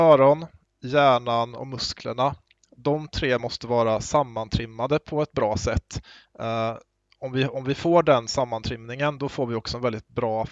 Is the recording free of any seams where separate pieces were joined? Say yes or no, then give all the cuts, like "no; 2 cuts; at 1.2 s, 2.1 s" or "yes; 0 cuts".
yes; 0 cuts